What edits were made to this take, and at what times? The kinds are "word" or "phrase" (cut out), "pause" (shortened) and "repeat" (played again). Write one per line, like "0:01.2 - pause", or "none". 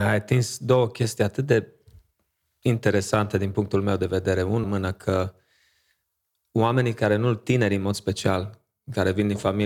0:04.6 - word